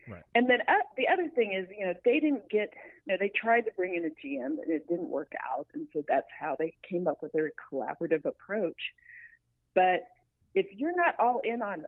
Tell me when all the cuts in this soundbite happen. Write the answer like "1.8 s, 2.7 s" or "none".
3.0 s